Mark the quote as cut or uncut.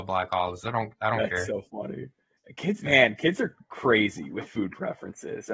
uncut